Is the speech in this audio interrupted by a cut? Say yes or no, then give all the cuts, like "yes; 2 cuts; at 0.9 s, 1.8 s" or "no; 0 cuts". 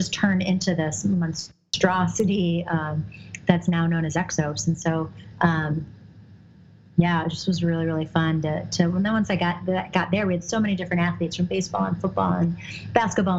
no; 0 cuts